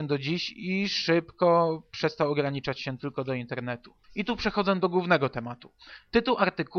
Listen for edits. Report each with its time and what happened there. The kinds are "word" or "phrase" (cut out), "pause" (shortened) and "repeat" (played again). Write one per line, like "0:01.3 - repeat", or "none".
0:04.0 - pause